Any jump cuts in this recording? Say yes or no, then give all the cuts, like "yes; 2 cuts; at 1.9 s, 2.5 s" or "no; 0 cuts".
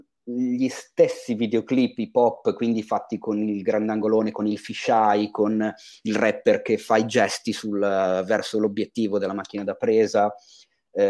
no; 0 cuts